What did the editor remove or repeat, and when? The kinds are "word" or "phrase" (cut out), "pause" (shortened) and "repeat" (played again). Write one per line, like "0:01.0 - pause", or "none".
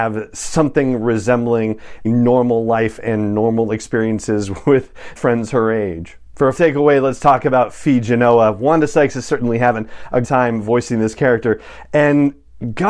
0:02.0 - word
0:05.2 - word
0:06.6 - word
0:10.2 - word

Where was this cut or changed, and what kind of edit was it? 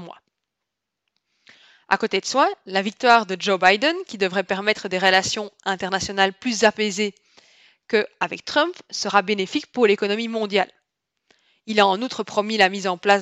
none

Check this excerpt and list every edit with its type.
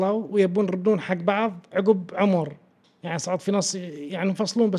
none

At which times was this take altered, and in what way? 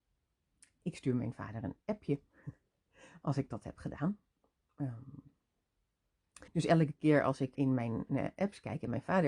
0:01.8 - pause
0:06.5 - pause
0:07.5 - word

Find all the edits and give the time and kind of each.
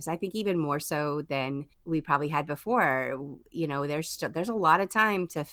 0:01.7 - pause

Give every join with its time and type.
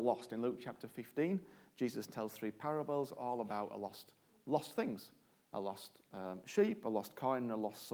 none

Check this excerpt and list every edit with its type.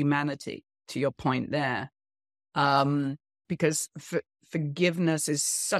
0:03.4 - phrase

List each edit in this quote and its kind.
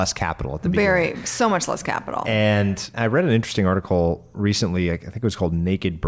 0:02.9 - word

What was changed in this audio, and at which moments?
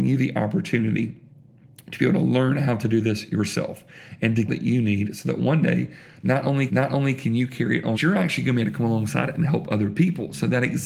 0:04.5 - phrase
0:06.7 - repeat
0:07.9 - phrase

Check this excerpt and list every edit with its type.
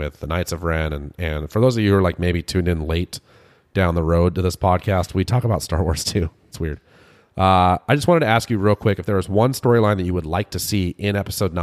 none

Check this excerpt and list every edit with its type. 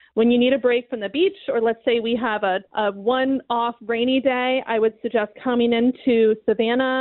0:02.7 - pause

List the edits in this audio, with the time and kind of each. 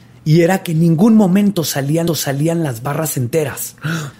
0:02.1 - repeat

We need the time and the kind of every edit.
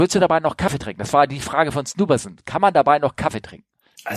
none

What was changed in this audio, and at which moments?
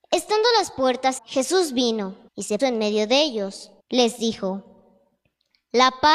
0:01.2 - word
0:02.3 - pause
0:02.6 - word
0:03.8 - pause

